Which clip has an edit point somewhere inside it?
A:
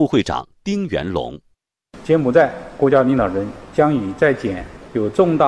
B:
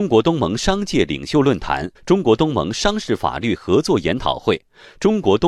B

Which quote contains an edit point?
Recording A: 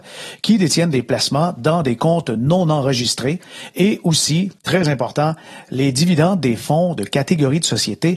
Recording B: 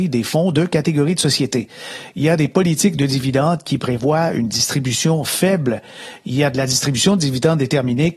A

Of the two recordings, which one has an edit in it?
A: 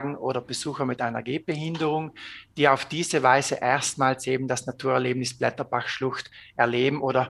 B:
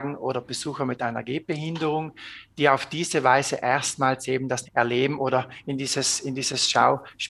B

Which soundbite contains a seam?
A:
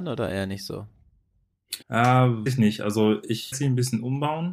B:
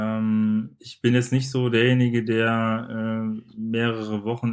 A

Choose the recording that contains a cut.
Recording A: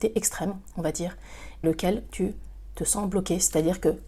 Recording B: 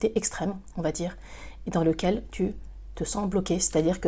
A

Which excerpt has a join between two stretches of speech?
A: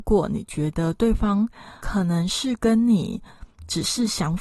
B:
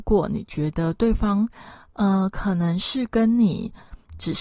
A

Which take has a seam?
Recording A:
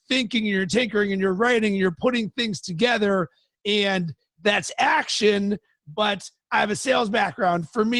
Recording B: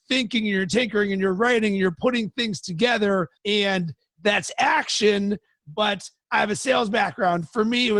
B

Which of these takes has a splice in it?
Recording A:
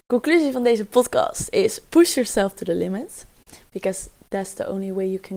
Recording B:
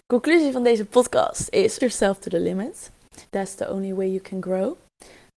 B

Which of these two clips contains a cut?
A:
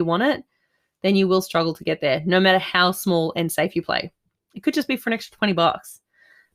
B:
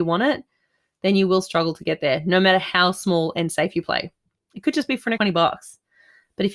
B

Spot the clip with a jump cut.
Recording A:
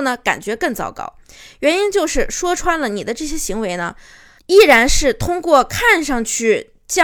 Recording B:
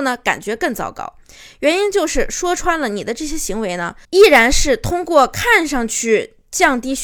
B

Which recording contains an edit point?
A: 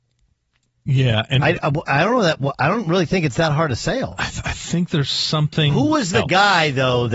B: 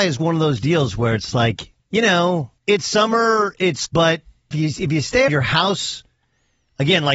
B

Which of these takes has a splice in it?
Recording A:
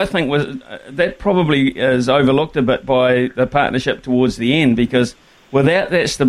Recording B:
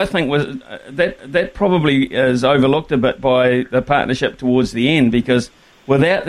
B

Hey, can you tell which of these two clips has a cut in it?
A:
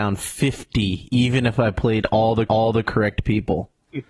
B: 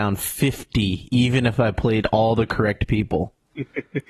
A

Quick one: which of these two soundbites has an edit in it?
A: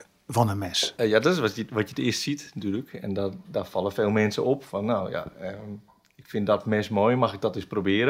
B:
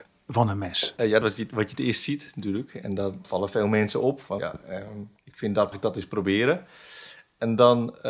B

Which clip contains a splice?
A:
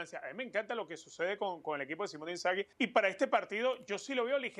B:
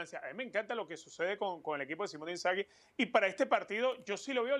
A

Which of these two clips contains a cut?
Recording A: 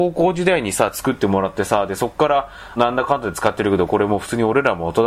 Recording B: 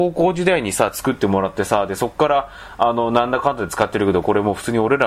A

